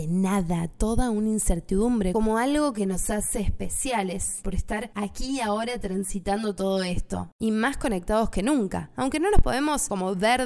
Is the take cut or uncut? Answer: uncut